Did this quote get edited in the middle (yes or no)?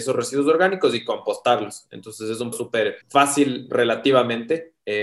yes